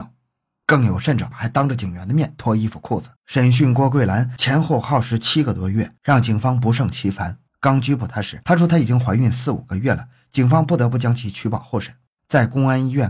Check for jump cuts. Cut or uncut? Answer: cut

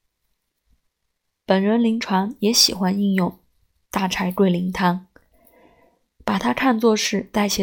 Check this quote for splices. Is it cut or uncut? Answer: uncut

